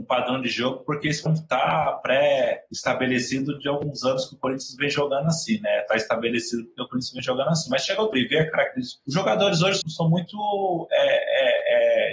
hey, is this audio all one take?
no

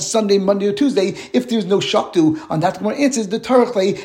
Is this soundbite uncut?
yes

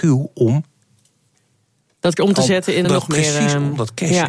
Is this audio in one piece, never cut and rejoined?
no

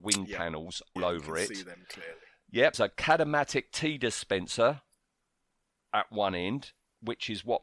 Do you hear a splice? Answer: yes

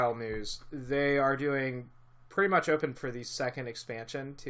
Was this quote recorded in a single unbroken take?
no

